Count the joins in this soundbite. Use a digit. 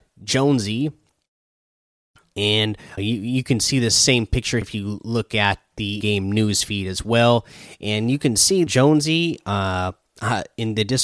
4